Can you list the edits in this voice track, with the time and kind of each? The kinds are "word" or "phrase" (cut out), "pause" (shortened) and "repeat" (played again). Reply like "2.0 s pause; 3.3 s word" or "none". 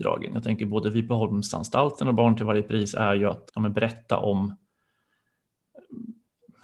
3.5 s pause